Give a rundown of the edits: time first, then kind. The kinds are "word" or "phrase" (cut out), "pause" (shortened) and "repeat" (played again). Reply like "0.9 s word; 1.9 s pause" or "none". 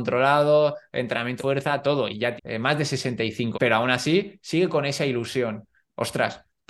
1.4 s word; 2.4 s word; 3.5 s word